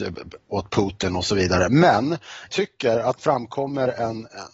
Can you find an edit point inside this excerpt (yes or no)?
yes